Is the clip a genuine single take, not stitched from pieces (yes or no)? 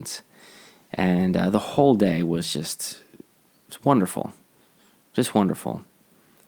yes